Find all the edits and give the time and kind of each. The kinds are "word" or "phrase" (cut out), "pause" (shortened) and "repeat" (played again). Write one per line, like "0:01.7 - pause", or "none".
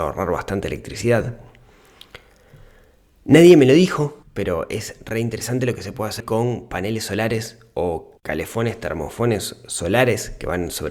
0:04.2 - pause
0:06.2 - word
0:08.2 - pause